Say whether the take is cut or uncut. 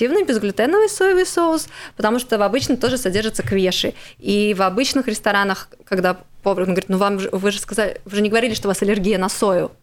uncut